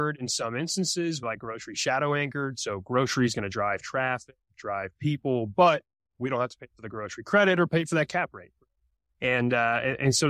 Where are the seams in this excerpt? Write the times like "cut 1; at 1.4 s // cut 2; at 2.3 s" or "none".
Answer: cut 1; at 1.2 s